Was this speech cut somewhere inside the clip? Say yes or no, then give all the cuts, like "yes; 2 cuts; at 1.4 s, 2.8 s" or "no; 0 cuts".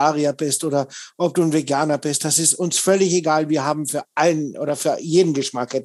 no; 0 cuts